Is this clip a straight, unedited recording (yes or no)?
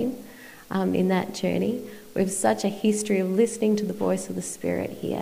yes